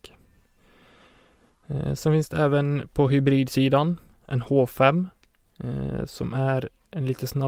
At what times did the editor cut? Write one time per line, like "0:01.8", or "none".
none